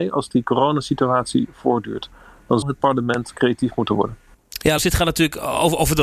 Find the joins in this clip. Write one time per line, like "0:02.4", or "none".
0:02.6
0:04.8